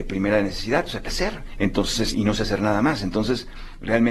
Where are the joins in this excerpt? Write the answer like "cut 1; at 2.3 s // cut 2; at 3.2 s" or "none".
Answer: cut 1; at 1.0 s // cut 2; at 2.1 s